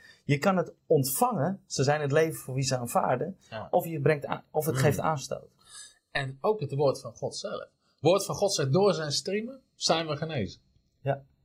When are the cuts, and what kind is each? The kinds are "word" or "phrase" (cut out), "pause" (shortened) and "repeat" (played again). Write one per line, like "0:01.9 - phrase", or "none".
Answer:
none